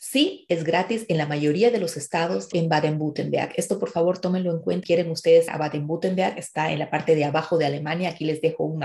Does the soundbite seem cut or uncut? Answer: cut